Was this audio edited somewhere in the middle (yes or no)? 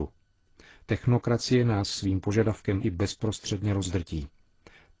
yes